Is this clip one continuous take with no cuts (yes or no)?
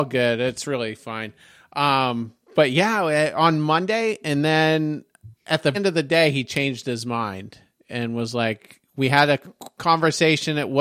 no